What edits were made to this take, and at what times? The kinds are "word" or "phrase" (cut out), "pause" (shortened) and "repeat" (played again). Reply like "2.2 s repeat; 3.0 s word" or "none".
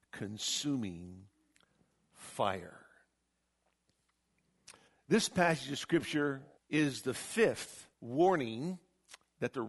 4.9 s pause; 6.6 s pause; 7.9 s pause